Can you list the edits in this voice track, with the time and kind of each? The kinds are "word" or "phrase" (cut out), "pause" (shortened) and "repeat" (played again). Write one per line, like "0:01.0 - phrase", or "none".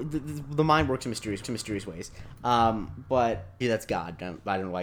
0:01.4 - repeat
0:03.6 - word